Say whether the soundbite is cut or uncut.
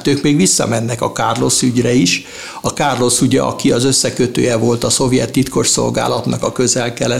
uncut